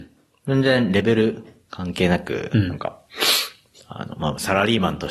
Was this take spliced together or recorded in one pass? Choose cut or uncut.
uncut